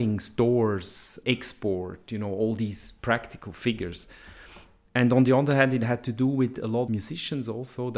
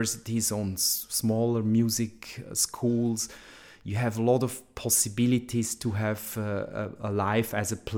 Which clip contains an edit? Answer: first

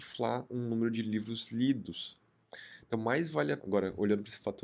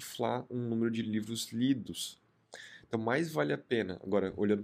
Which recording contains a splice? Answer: first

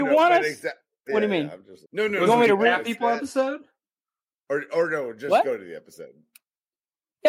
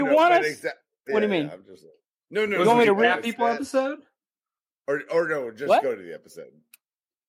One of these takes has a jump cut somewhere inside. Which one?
first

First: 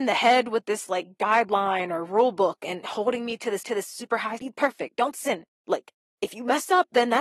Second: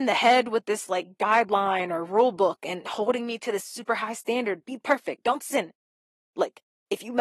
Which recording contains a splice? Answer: first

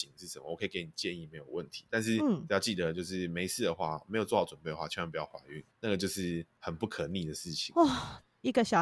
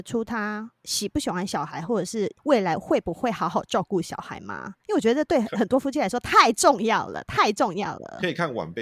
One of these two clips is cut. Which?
second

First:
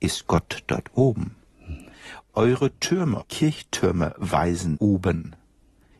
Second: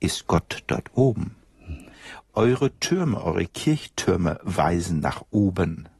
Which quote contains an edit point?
first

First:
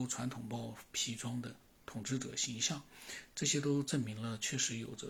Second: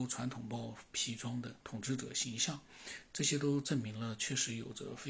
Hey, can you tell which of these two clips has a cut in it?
second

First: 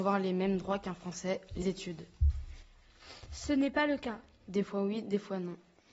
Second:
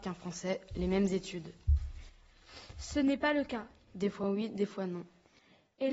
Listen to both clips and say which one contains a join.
first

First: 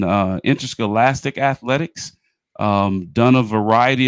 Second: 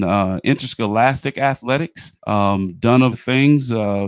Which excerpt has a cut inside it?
second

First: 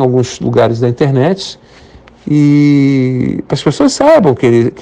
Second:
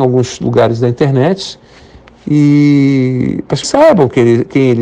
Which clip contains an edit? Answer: second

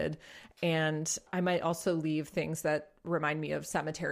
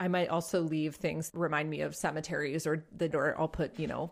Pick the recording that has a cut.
second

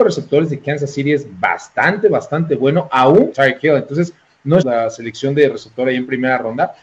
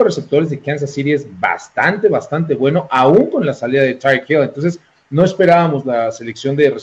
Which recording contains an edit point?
first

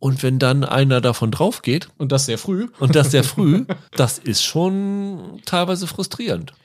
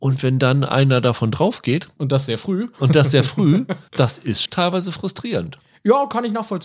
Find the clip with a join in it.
second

